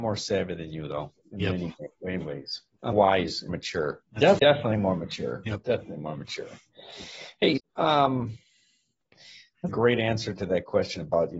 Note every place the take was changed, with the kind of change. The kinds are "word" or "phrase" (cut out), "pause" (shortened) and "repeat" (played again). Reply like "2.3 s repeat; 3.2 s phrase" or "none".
2.2 s word; 2.9 s word; 3.5 s word; 4.4 s word; 7.6 s word; 9.7 s word